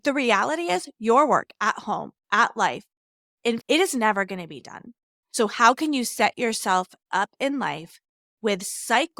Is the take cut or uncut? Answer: cut